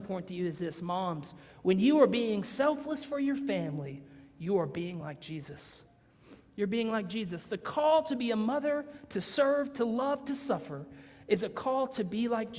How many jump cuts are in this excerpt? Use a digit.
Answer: 0